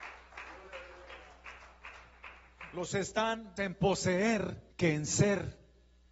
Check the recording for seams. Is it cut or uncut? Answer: cut